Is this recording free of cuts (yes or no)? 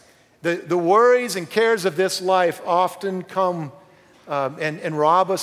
yes